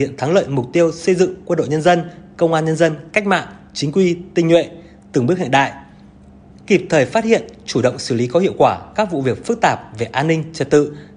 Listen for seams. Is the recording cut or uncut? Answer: uncut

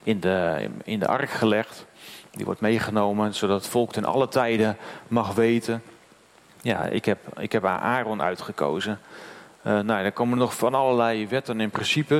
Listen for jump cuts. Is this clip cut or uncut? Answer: uncut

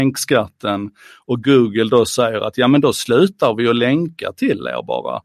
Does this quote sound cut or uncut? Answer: uncut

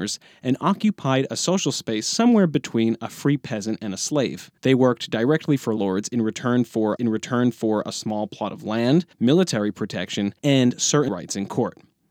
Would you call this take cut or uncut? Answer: cut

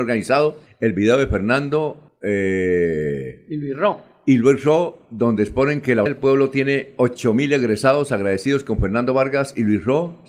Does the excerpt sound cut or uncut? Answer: cut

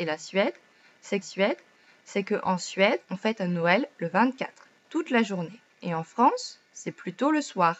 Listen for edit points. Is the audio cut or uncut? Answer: cut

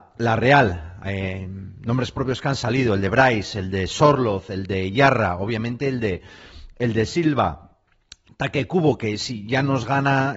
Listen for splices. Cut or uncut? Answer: uncut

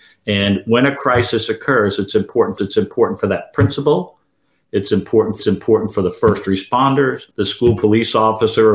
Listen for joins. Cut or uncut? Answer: cut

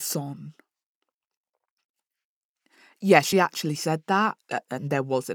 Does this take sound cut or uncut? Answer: uncut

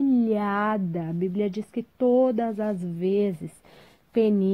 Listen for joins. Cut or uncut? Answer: uncut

